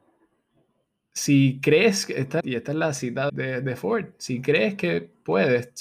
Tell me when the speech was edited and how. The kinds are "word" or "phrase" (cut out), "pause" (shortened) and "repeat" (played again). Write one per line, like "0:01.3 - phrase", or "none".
0:02.4 - word
0:03.3 - word